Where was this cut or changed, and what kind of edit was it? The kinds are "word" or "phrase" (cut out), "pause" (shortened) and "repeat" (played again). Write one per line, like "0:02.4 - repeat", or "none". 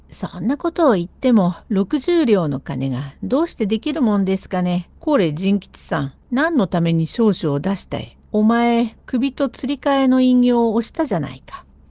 0:01.6 - pause
0:05.0 - pause
0:06.2 - pause
0:08.2 - pause